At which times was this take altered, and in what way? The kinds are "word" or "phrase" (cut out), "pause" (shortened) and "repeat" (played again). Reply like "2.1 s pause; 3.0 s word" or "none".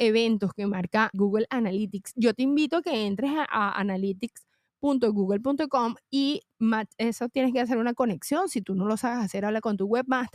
1.1 s word

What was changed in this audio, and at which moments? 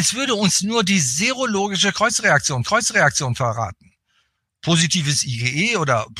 2.6 s repeat

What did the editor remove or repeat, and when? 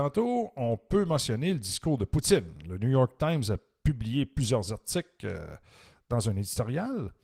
none

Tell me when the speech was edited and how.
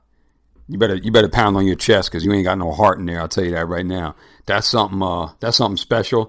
none

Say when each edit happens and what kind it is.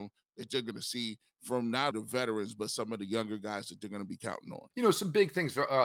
1.9 s word; 4.7 s pause

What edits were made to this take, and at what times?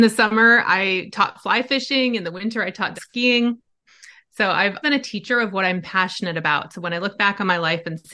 3.0 s word; 4.8 s word

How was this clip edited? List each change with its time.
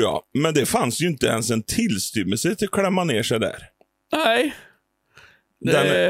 none

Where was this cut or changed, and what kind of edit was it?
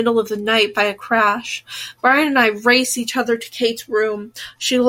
none

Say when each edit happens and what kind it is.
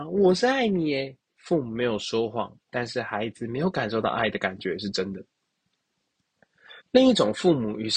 1.3 s pause; 6.8 s pause

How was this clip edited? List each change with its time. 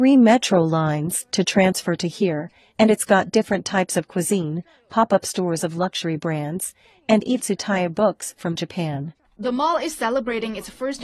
7.4 s word; 9.2 s pause

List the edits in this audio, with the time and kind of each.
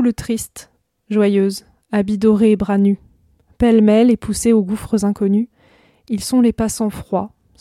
none

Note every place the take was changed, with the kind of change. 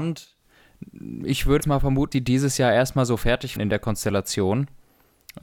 1.6 s word; 2.1 s word; 3.6 s word

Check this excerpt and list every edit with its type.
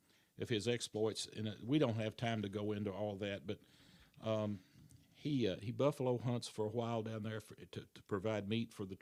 5.6 s word

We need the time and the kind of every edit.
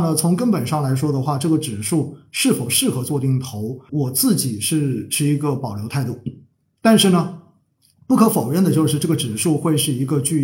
3.9 s word

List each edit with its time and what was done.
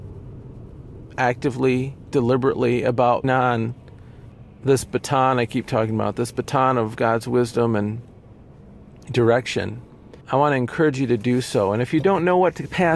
3.2 s word; 10.2 s pause

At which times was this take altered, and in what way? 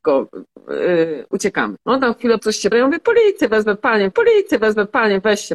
1.8 s pause; 2.4 s word; 2.7 s word; 4.1 s repeat

